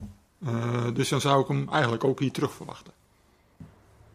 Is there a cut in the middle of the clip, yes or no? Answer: no